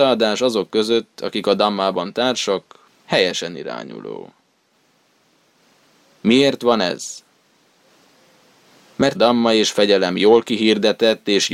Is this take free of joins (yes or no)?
no